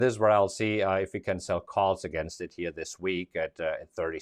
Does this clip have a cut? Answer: no; 0 cuts

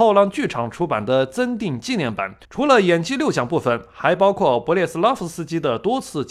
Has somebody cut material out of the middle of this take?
yes; 1 cut; at 2.4 s

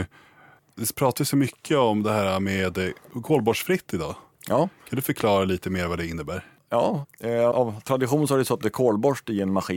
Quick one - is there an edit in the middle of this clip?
yes; 1 cut; at 7.5 s

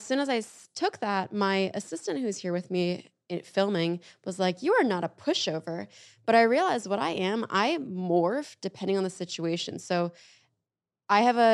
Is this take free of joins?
yes; 0 cuts

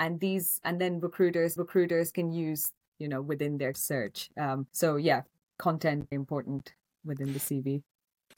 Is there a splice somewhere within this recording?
yes; 5 cuts; at 1.6 s, 2.9 s, 3.7 s, 4.7 s, 6.1 s

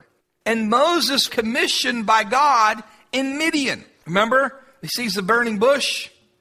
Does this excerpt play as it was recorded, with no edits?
no; 1 cut; at 1.3 s

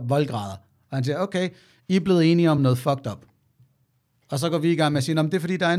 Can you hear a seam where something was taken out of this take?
no; 0 cuts

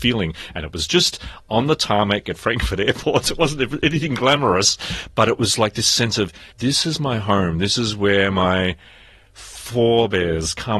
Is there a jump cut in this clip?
yes; 1 cut; at 6.5 s

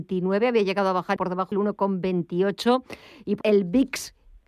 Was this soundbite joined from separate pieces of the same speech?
yes; 3 cuts; at 1.2 s, 1.5 s, 3.4 s

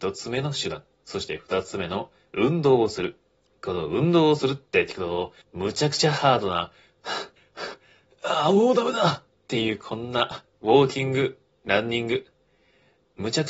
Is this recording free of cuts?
no; 5 cuts; at 0.9 s, 3.4 s, 5.4 s, 7.4 s, 11.5 s

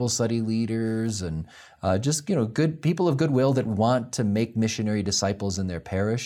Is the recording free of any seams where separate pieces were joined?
yes; 0 cuts

